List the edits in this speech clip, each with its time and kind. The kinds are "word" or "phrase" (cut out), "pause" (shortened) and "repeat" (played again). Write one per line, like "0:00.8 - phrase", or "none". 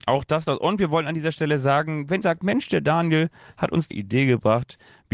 0:02.2 - word
0:03.9 - phrase